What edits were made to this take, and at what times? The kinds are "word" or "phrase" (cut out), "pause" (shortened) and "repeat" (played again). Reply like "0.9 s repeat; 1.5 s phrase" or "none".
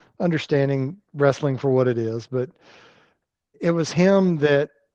none